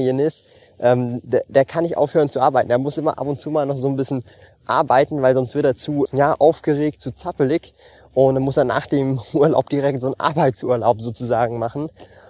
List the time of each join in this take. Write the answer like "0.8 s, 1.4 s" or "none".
6.0 s